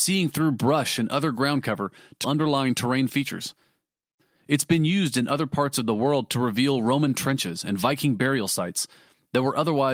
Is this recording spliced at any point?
yes; 1 cut; at 2.2 s

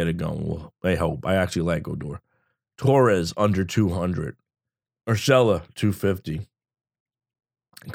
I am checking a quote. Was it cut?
no; 0 cuts

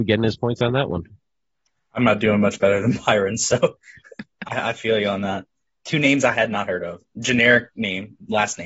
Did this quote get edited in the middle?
no; 0 cuts

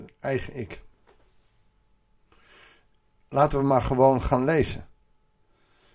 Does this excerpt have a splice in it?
no; 0 cuts

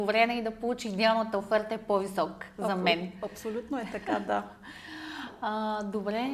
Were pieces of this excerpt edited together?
no; 0 cuts

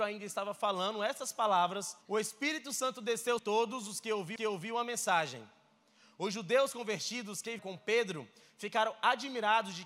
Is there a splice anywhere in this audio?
yes; 4 cuts; at 2.0 s, 3.4 s, 4.4 s, 7.6 s

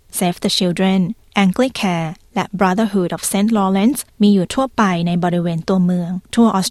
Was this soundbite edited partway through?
no; 0 cuts

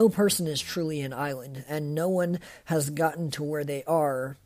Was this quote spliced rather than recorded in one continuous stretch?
no; 0 cuts

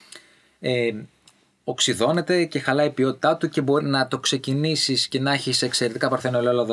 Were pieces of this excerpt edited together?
yes; 1 cut; at 3.8 s

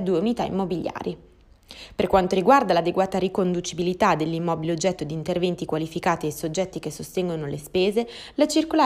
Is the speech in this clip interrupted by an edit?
no; 0 cuts

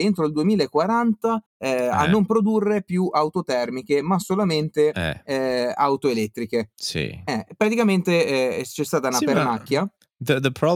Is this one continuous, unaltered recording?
no; 1 cut; at 1.5 s

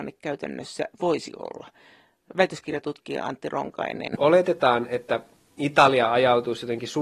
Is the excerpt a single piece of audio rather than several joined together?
yes; 0 cuts

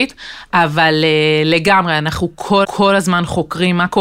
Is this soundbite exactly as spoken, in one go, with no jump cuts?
no; 1 cut; at 2.6 s

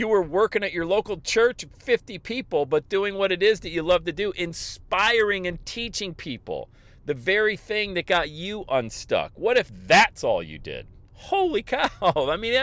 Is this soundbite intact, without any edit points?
yes; 0 cuts

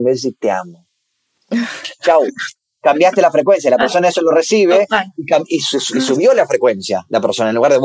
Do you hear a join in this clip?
no; 0 cuts

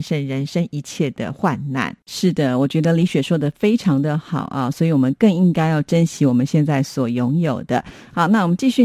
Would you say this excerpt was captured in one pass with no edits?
no; 1 cut; at 2.0 s

